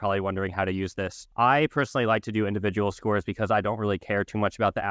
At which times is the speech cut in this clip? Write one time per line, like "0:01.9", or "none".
0:01.3